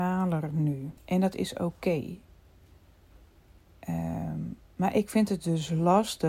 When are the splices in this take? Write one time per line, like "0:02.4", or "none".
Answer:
0:01.0